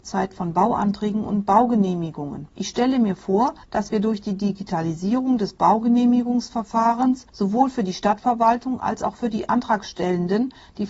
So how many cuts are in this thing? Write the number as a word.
two